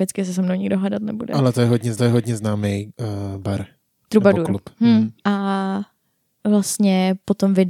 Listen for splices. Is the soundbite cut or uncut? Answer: cut